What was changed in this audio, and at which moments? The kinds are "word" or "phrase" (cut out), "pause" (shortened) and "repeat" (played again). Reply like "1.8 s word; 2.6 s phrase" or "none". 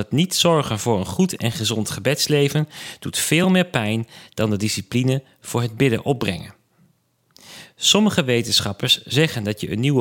none